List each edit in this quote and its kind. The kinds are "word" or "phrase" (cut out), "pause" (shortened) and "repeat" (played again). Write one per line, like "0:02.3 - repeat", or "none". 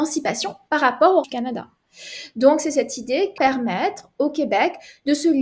0:01.2 - word
0:03.4 - phrase